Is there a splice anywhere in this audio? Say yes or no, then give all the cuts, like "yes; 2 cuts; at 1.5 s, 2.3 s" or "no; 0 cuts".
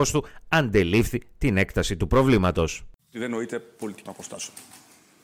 yes; 1 cut; at 4.0 s